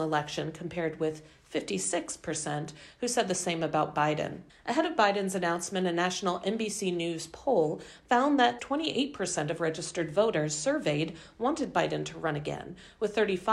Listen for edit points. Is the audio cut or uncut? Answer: cut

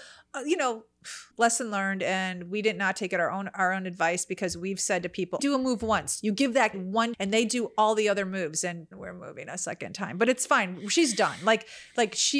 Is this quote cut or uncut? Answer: cut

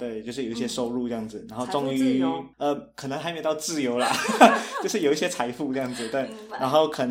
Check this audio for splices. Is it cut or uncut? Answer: cut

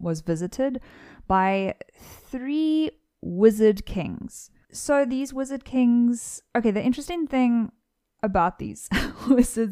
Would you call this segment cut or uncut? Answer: uncut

